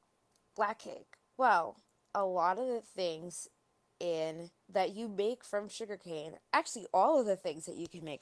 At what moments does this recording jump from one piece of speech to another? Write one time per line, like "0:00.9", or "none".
0:01.9
0:04.6
0:06.4

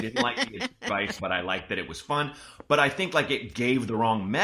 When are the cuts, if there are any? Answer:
0:01.2

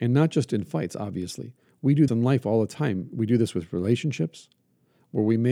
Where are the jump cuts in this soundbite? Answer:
0:02.1

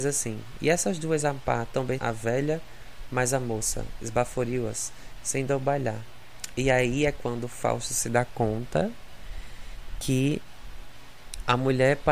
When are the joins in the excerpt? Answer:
0:02.0
0:05.5

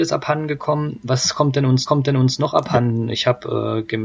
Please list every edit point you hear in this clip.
0:01.9

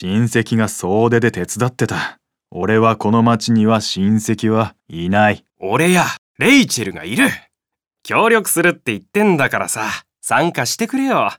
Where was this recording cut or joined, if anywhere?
0:02.3
0:04.8
0:05.5

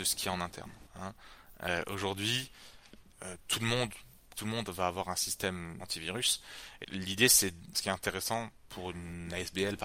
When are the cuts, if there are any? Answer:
0:04.3
0:05.8
0:06.8
0:07.7

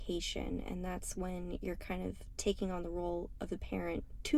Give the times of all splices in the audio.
none

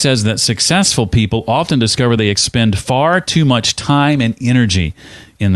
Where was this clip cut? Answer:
none

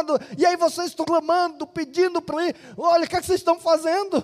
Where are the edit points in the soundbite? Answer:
0:01.0
0:02.3

